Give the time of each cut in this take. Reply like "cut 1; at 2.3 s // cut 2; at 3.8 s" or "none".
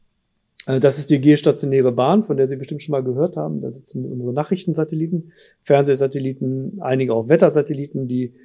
none